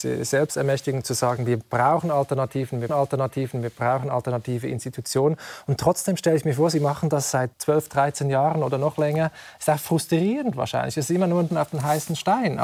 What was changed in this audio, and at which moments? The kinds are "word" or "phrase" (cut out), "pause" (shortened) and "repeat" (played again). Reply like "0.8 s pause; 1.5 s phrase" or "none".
2.9 s repeat; 7.5 s pause; 11.5 s word